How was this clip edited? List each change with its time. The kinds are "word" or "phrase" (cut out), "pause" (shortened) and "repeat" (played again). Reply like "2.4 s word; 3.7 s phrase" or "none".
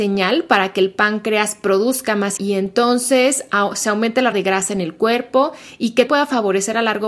2.4 s word; 4.3 s word; 6.1 s word